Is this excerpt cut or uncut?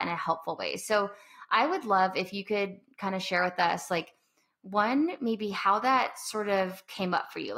uncut